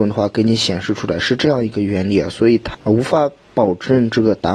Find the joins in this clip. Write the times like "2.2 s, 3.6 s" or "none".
2.7 s